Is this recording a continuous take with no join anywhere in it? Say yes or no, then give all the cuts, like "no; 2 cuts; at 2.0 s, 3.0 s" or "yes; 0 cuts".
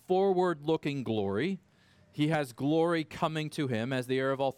yes; 0 cuts